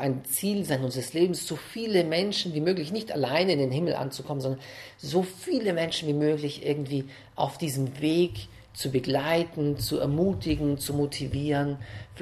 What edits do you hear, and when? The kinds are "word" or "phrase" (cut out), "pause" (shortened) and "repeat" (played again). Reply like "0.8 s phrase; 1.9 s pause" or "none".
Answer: none